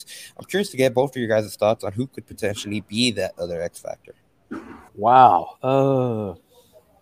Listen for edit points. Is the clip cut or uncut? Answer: cut